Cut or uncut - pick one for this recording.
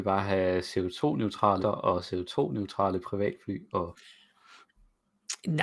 cut